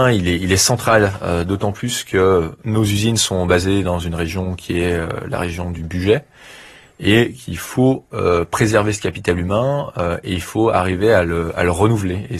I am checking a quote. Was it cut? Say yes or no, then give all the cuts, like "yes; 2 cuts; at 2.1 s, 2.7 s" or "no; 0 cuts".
no; 0 cuts